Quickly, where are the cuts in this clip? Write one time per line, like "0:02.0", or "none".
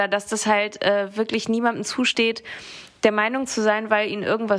none